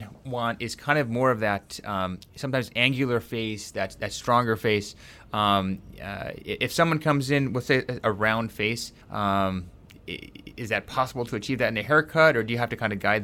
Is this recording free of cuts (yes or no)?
no